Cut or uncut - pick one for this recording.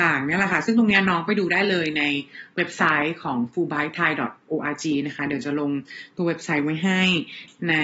uncut